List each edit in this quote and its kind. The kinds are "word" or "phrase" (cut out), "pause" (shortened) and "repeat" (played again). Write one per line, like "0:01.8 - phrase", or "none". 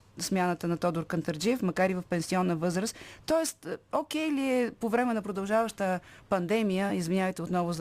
none